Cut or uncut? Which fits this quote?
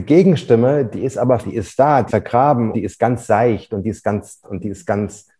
cut